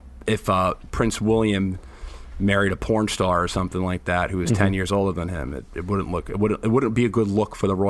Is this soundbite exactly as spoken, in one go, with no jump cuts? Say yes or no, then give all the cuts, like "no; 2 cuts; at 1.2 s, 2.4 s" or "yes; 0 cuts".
yes; 0 cuts